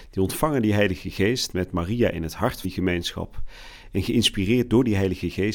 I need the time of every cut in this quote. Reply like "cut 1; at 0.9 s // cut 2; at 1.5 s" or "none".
cut 1; at 2.6 s